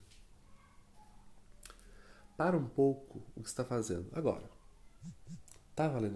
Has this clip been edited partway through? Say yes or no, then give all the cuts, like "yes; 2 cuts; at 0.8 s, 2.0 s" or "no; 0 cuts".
no; 0 cuts